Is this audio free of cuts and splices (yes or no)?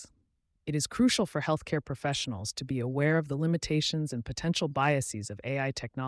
yes